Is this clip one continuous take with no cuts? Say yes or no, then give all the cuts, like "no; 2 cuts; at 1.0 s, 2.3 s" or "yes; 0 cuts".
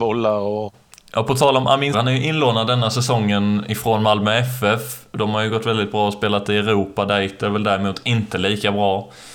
no; 1 cut; at 1.9 s